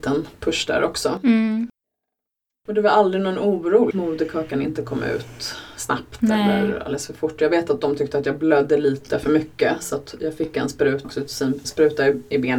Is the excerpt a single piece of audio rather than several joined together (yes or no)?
no